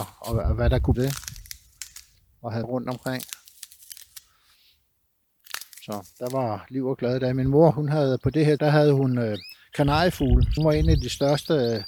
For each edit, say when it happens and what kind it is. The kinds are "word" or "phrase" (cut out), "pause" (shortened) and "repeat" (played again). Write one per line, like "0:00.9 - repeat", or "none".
0:00.9 - phrase
0:02.6 - word
0:05.7 - pause
0:07.7 - word
0:08.6 - word
0:10.6 - phrase